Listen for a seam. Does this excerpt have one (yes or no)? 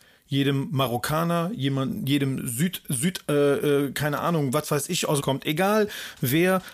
yes